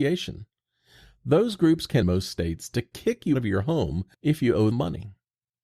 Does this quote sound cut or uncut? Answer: cut